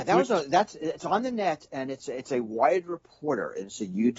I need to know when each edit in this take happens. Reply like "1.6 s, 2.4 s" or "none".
none